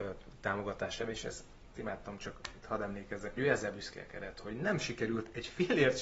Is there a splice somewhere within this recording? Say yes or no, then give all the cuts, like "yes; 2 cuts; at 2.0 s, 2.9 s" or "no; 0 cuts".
yes; 2 cuts; at 1.7 s, 3.4 s